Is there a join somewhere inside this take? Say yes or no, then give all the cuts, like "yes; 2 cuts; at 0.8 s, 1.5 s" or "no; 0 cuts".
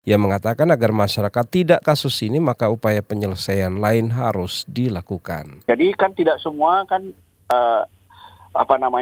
yes; 1 cut; at 1.8 s